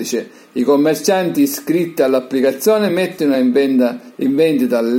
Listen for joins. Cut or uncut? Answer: uncut